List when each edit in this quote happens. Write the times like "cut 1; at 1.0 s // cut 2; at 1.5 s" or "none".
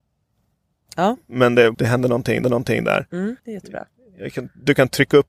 cut 1; at 1.7 s // cut 2; at 2.4 s // cut 3; at 3.4 s